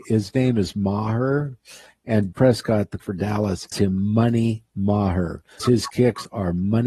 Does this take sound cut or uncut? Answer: cut